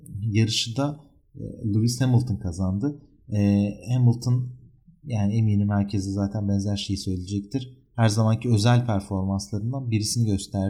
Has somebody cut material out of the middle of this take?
no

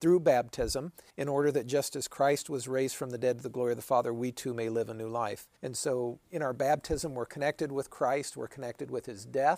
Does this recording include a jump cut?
yes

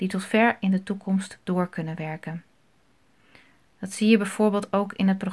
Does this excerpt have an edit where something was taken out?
no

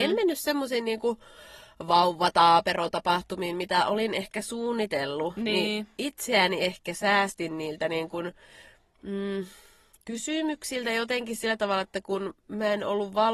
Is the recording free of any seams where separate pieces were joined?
yes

